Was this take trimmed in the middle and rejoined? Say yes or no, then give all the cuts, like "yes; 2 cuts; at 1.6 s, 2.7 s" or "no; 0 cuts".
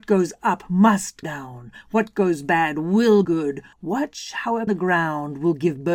yes; 4 cuts; at 1.2 s, 3.2 s, 3.7 s, 4.7 s